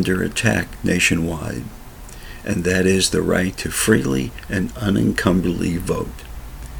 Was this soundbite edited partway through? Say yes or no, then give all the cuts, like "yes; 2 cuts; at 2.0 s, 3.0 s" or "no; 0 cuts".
no; 0 cuts